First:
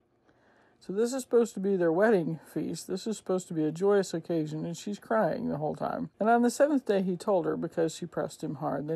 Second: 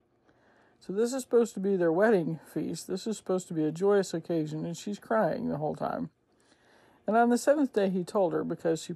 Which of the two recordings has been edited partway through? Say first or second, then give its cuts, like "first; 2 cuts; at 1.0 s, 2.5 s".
first; 1 cut; at 6.1 s